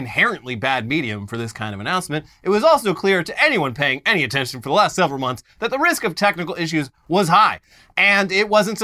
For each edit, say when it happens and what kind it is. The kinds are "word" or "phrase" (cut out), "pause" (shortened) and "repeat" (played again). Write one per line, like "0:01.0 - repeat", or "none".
none

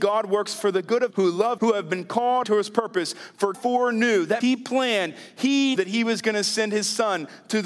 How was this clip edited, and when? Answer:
0:01.1 - word
0:01.6 - word
0:02.4 - word
0:03.5 - word
0:04.4 - word
0:05.8 - word

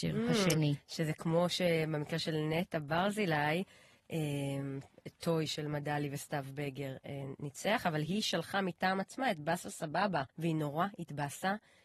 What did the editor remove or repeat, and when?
0:10.3 - pause

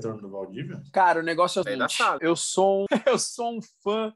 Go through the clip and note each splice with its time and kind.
0:01.6 - word
0:02.2 - phrase
0:02.9 - word

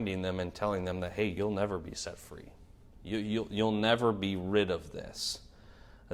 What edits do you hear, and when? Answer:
none

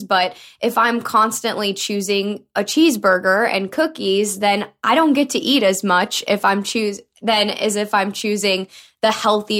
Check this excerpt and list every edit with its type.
none

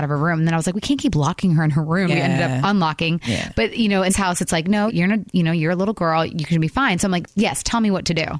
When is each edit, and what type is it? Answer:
0:02.1 - word
0:04.1 - word
0:04.9 - word

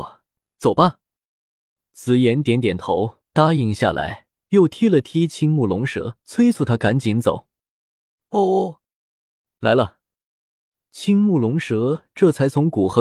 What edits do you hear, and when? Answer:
0:03.2 - pause
0:06.2 - pause

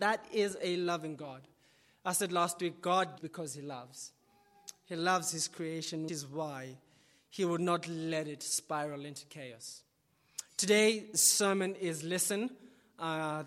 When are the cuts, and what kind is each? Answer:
0:03.2 - word
0:06.1 - word

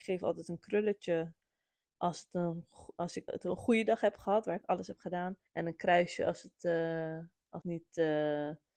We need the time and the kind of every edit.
0:03.3 - word
0:05.5 - pause
0:07.6 - word

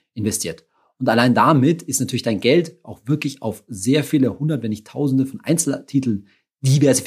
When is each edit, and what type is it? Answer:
none

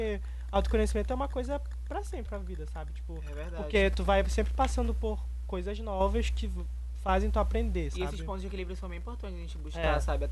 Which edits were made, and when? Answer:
0:02.3 - word

